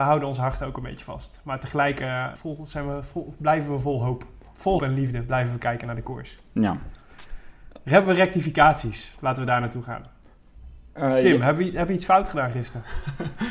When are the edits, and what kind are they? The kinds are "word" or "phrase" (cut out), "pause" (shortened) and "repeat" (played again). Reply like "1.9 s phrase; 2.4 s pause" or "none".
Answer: 2.4 s phrase; 4.8 s word